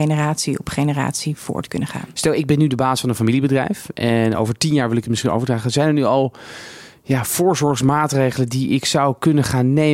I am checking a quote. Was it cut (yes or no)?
no